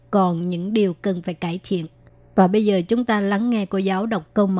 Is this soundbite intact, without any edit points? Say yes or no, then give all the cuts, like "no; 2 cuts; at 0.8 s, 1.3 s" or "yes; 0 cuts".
yes; 0 cuts